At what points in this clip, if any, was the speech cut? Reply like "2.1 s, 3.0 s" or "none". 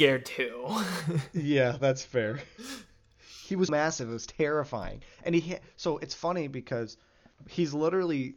3.7 s